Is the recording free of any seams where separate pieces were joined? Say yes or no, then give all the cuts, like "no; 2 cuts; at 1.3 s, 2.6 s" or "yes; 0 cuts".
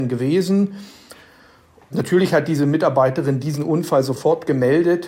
yes; 0 cuts